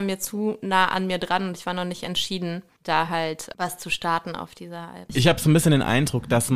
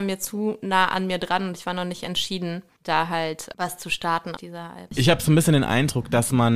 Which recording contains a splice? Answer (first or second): second